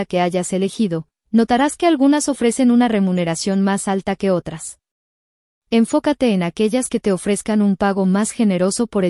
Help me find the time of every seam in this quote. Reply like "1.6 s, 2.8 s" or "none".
none